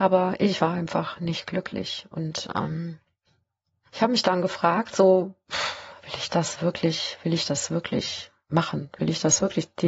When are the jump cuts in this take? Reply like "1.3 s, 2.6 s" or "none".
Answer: none